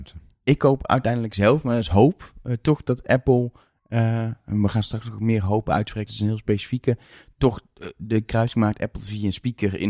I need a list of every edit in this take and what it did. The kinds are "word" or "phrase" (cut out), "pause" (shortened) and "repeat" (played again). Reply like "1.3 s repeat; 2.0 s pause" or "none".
6.1 s word